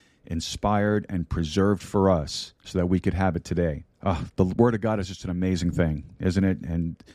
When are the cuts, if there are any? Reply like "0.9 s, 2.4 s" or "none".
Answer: 2.6 s, 3.9 s